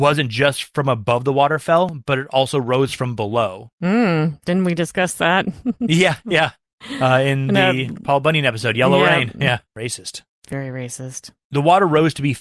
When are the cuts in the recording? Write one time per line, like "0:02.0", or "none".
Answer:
0:09.7
0:11.4